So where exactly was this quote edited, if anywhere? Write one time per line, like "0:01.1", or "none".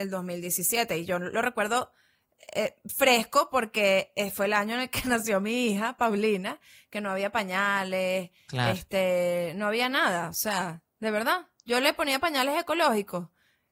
none